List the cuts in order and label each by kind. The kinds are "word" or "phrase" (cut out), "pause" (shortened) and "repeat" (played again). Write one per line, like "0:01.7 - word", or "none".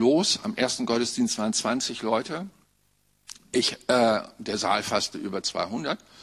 none